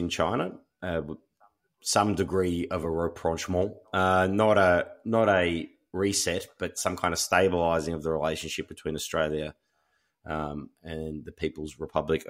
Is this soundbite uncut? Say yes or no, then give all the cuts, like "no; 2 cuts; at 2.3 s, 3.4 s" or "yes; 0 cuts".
yes; 0 cuts